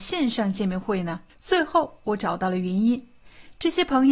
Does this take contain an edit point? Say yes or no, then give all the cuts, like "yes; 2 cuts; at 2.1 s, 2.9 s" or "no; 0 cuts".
yes; 1 cut; at 1.3 s